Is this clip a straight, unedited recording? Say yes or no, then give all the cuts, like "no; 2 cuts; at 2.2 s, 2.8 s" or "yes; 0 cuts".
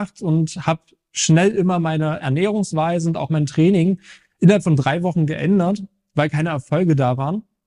yes; 0 cuts